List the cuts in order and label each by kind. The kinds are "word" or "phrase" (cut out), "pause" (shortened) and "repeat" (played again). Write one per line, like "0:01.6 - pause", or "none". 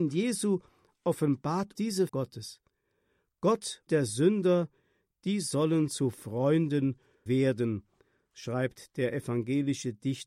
0:01.8 - word
0:02.1 - word
0:03.9 - word
0:07.3 - word